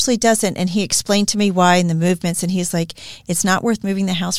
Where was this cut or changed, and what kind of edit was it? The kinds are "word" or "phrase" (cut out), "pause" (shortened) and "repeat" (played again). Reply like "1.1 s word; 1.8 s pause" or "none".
none